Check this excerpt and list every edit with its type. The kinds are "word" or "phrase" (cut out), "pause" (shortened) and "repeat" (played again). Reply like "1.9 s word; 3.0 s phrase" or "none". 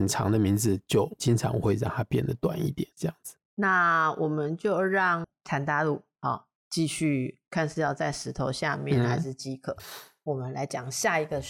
2.9 s pause